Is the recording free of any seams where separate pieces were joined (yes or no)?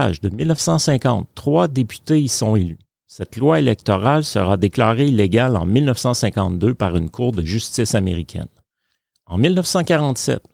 yes